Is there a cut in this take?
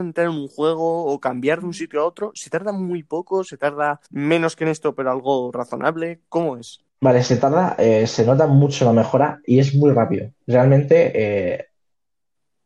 yes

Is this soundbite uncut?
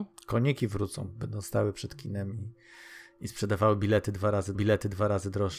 no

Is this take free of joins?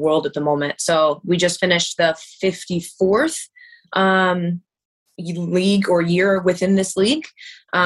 yes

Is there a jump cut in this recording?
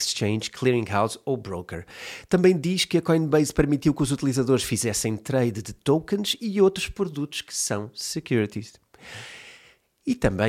no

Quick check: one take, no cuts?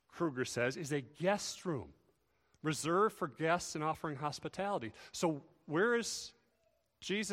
yes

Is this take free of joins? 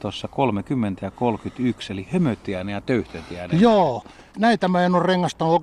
no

